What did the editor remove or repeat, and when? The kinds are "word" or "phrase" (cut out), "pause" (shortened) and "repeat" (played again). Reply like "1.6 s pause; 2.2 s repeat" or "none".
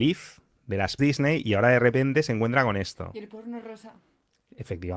1.0 s word